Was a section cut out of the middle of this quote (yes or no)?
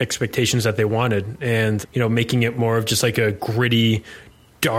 yes